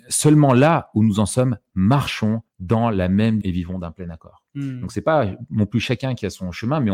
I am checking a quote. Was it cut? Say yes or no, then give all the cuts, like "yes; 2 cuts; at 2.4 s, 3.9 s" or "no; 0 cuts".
yes; 2 cuts; at 2.5 s, 3.4 s